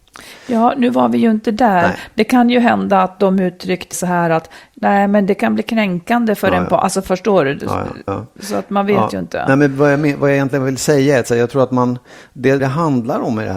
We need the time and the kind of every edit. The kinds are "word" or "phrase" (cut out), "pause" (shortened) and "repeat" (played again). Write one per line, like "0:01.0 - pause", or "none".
0:03.9 - word
0:08.1 - word
0:12.6 - word